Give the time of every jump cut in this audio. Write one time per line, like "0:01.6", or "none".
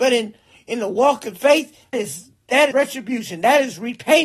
0:01.9
0:02.7